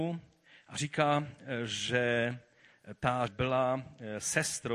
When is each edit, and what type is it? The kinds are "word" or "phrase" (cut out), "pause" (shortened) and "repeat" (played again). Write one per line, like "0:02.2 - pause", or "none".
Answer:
0:03.3 - word